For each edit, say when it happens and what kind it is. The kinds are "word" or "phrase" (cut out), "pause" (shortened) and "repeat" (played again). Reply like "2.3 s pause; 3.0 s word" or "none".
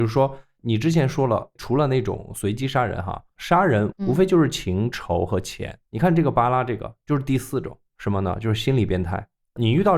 5.8 s pause